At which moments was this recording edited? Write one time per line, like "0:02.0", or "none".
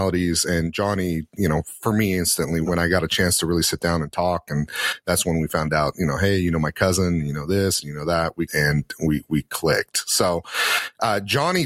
0:02.6
0:08.5